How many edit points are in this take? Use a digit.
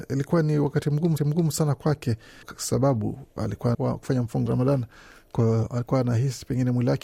4